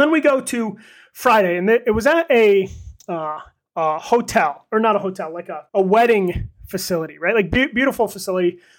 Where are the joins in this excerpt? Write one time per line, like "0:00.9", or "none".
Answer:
0:05.7